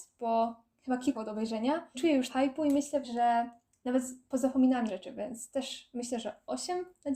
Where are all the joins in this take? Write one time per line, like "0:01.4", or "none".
0:01.1
0:01.9
0:02.3
0:03.0
0:04.9